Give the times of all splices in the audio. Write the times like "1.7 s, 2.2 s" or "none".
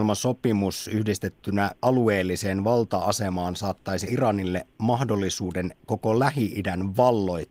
1.8 s, 4.1 s, 5.8 s